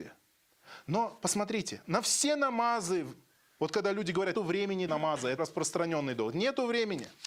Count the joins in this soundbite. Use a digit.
4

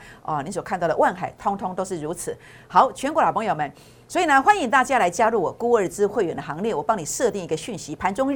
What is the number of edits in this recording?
0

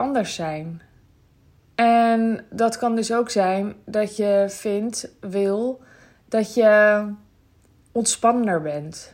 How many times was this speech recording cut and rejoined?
0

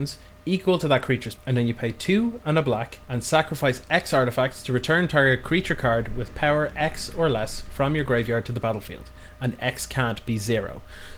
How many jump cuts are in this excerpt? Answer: 2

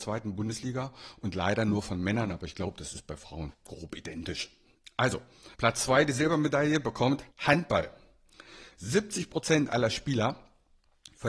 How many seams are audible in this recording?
3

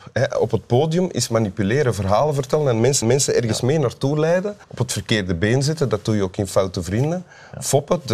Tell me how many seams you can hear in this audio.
2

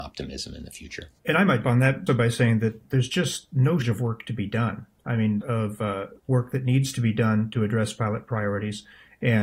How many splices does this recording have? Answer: 7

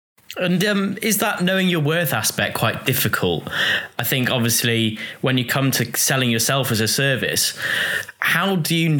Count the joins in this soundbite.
0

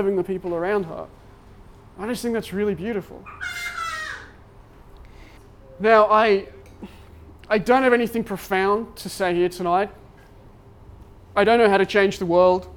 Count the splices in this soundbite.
1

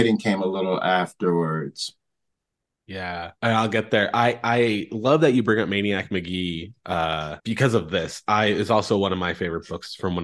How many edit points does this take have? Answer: 2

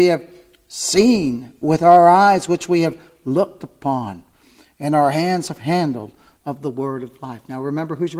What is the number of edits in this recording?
0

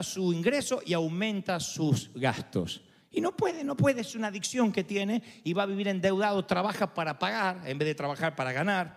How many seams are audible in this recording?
1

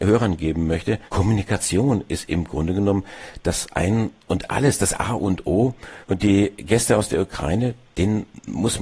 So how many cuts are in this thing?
2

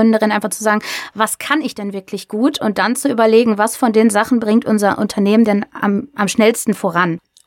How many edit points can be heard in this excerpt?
0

